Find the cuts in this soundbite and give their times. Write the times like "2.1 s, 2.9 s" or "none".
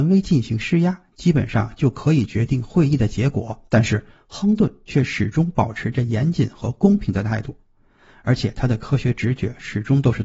3.7 s